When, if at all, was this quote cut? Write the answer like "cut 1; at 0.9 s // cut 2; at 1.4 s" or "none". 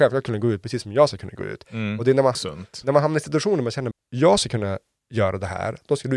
cut 1; at 2.3 s // cut 2; at 3.9 s